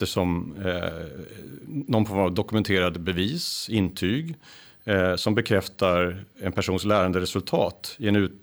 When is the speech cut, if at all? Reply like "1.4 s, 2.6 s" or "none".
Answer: none

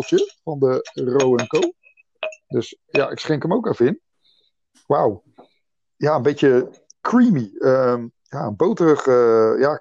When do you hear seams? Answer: none

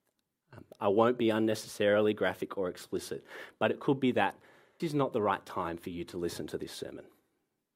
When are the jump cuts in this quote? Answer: 4.8 s

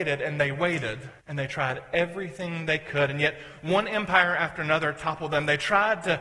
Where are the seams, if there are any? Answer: 1.2 s

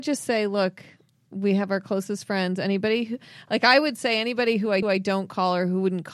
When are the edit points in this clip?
4.8 s

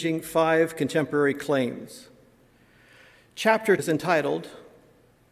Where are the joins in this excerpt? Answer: 3.8 s

